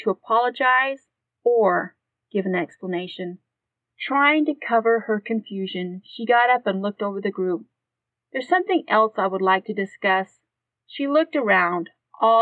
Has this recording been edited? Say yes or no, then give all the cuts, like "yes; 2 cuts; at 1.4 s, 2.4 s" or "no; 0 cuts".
no; 0 cuts